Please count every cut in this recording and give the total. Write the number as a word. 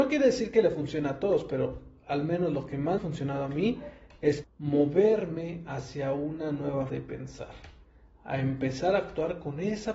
three